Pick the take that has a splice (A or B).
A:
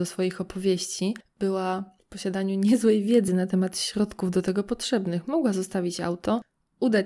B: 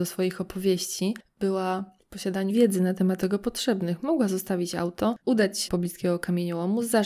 B